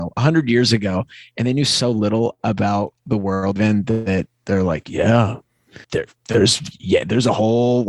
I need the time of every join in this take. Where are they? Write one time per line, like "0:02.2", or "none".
0:03.6
0:05.8

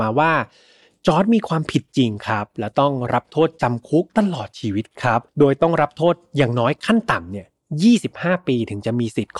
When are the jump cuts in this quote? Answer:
0:04.1
0:05.3

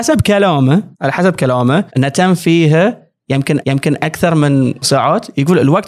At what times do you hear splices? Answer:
0:00.9
0:01.9
0:03.6
0:04.8

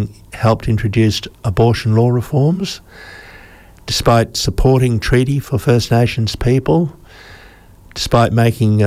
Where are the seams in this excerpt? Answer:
none

